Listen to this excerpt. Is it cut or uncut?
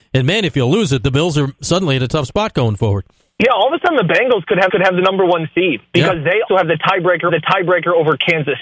cut